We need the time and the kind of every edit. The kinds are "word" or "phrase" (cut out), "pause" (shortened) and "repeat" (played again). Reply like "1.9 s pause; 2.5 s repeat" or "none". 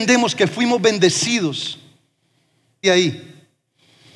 2.8 s phrase